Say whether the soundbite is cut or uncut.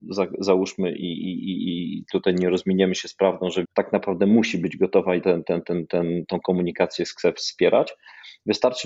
cut